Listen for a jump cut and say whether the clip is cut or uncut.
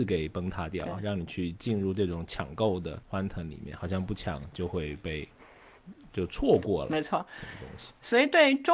cut